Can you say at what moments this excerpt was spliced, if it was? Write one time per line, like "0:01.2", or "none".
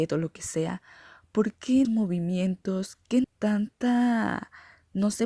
0:01.8
0:03.2